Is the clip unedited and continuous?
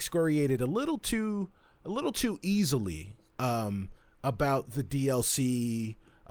yes; 0 cuts

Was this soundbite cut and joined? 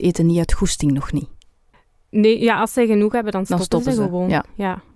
no; 0 cuts

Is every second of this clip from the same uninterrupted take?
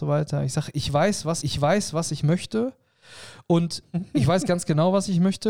no; 1 cut; at 1.4 s

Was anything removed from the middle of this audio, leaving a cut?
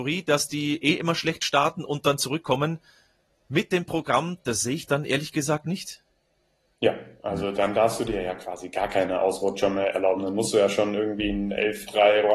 no; 0 cuts

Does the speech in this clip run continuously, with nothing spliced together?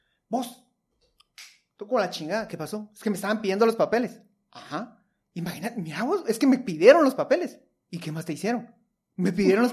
yes; 0 cuts

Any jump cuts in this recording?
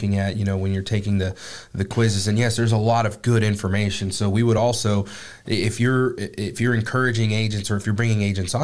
no; 0 cuts

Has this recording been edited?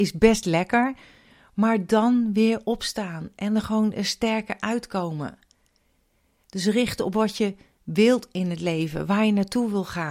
no; 0 cuts

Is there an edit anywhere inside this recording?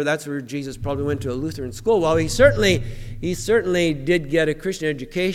no; 0 cuts

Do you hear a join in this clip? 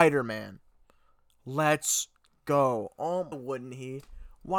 yes; 1 cut; at 3.3 s

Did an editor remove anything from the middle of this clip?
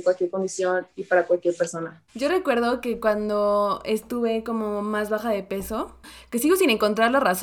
yes; 1 cut; at 2.1 s

